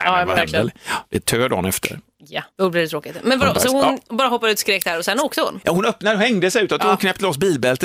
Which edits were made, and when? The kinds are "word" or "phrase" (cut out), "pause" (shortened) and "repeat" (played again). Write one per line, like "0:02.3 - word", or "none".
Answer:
0:02.5 - pause